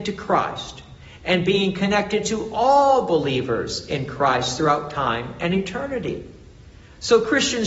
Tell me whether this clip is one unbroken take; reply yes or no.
yes